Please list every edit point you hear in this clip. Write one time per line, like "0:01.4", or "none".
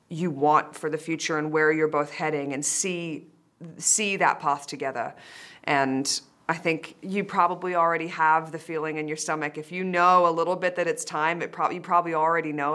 0:06.4